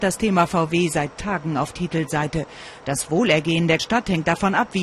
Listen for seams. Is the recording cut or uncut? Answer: cut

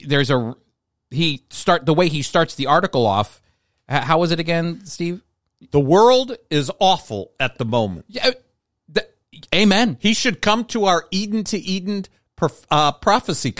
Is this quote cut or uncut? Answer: uncut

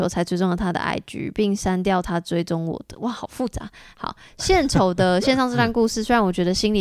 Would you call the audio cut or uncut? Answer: uncut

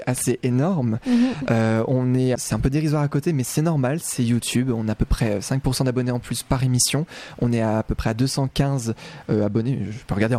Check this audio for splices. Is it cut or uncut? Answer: cut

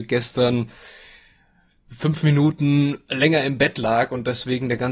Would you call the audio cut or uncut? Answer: uncut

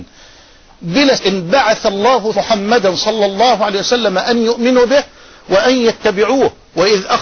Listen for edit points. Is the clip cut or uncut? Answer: cut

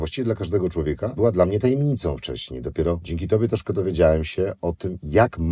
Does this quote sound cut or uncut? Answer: uncut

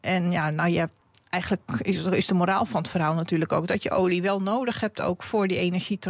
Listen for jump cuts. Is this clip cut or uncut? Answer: uncut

